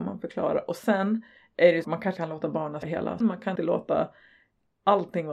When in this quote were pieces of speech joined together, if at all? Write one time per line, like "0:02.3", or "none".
0:01.8
0:02.2
0:02.8
0:03.2
0:03.6